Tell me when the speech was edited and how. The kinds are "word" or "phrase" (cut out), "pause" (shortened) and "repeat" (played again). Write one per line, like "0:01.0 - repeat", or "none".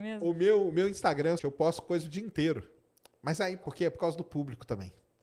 0:01.4 - word
0:03.6 - word